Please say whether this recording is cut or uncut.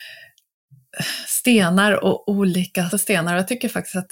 cut